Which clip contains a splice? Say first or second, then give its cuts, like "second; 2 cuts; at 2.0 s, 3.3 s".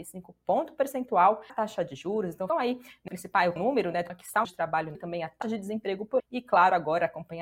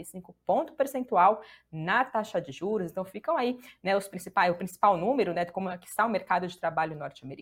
first; 9 cuts; at 1.5 s, 2.5 s, 3.1 s, 3.6 s, 4.1 s, 4.4 s, 4.9 s, 5.4 s, 6.2 s